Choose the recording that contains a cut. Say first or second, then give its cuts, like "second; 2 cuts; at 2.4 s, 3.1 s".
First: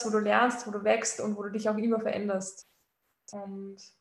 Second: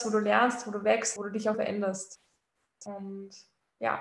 second; 2 cuts; at 1.2 s, 1.5 s